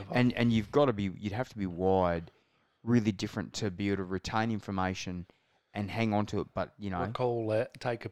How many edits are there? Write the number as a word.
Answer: zero